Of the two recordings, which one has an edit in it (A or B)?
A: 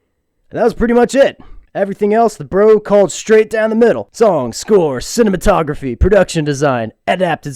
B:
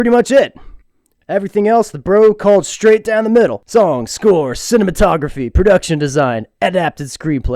A